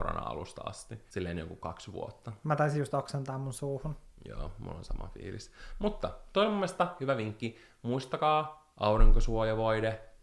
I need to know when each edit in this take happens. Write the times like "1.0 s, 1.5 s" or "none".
none